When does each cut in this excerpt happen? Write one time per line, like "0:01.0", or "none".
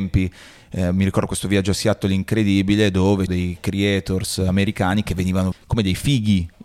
0:03.3
0:05.5